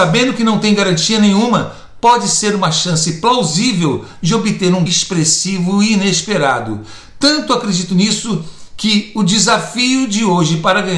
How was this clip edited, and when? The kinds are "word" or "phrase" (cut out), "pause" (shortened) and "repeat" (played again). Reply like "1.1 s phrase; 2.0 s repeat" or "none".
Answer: 4.9 s word